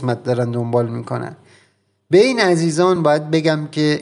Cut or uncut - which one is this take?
uncut